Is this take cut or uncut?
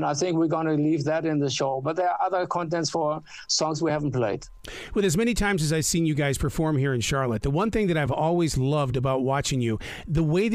uncut